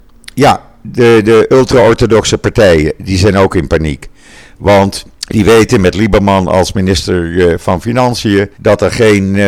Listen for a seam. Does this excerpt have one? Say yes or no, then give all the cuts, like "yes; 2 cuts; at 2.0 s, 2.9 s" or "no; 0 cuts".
yes; 2 cuts; at 5.1 s, 8.5 s